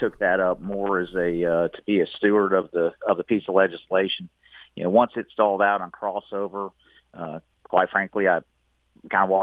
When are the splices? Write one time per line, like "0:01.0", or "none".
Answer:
none